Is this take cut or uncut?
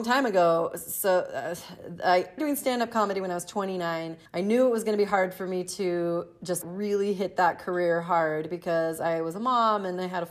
cut